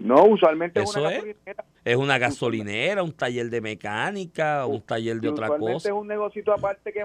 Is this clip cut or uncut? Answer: cut